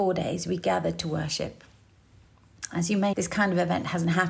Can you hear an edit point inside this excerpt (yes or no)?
yes